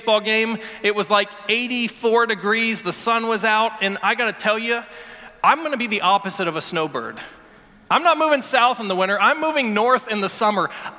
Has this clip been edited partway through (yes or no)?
no